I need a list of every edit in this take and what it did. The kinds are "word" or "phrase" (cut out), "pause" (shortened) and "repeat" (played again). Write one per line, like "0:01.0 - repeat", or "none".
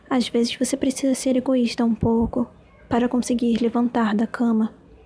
none